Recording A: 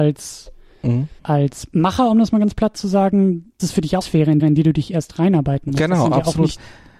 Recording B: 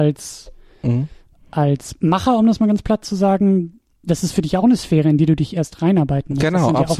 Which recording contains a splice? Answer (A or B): A